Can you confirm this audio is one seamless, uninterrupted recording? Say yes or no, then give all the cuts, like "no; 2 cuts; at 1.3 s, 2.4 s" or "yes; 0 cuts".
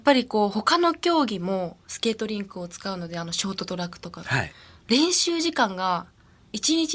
yes; 0 cuts